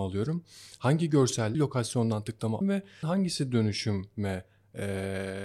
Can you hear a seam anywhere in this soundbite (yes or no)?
yes